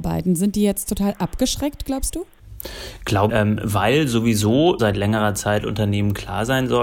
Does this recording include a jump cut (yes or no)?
yes